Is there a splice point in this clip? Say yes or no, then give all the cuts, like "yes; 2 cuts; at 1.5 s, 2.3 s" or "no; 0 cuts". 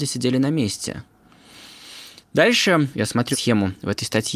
yes; 2 cuts; at 2.9 s, 3.3 s